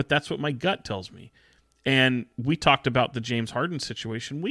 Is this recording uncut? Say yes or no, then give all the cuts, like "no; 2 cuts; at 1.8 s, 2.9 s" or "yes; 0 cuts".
yes; 0 cuts